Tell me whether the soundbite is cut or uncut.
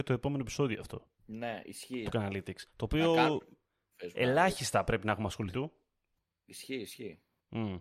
cut